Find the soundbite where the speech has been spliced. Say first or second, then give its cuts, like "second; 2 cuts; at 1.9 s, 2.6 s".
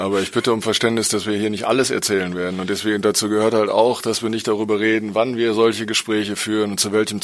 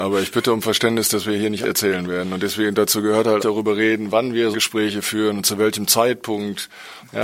second; 3 cuts; at 1.6 s, 3.4 s, 4.5 s